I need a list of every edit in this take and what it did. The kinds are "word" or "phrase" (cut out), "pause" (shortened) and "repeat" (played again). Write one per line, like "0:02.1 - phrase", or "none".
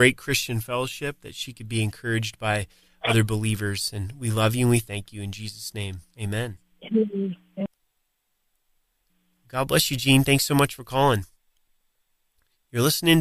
0:06.1 - pause